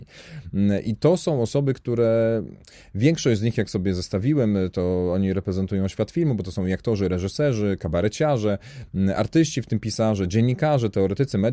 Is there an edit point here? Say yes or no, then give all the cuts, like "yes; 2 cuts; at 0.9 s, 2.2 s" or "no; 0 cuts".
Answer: no; 0 cuts